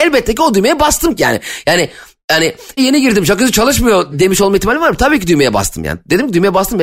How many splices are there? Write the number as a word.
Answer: two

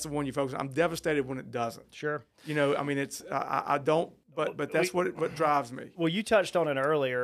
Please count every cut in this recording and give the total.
one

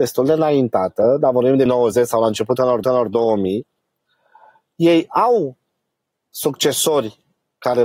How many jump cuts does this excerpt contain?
two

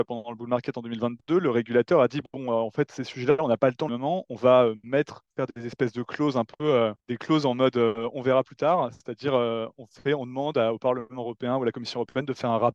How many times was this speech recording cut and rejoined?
three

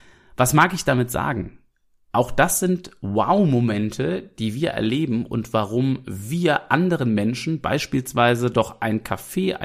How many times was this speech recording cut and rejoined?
zero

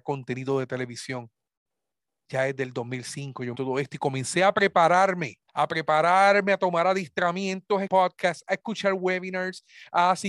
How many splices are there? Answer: three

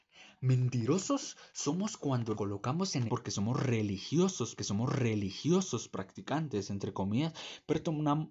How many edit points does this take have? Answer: three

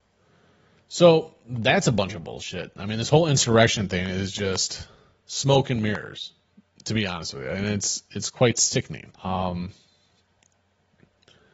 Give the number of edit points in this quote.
one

